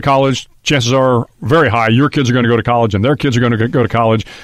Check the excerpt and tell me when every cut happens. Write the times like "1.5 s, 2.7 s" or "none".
none